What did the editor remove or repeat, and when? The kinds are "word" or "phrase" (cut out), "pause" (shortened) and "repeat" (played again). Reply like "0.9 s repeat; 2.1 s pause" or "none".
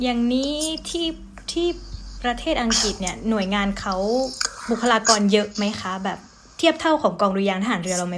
none